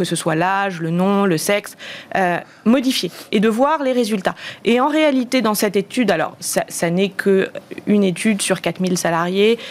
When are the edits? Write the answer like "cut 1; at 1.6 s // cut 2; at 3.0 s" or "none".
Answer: none